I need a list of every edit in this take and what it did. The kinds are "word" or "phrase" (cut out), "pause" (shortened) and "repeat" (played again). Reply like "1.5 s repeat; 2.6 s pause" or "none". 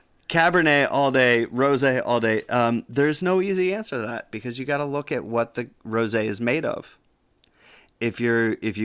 none